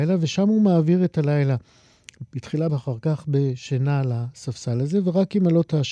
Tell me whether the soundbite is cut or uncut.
cut